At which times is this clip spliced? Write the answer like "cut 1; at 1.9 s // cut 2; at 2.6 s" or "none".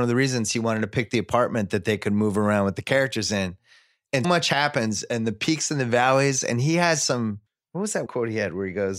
cut 1; at 4.2 s // cut 2; at 7.5 s // cut 3; at 8.1 s